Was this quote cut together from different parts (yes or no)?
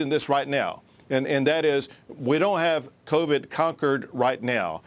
no